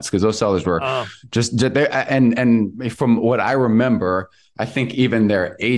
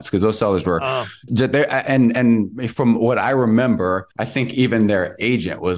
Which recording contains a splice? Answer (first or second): second